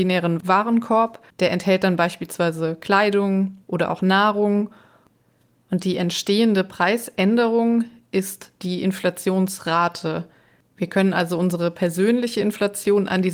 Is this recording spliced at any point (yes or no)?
yes